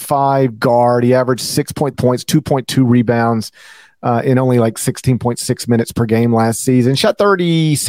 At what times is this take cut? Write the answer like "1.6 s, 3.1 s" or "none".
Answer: 1.9 s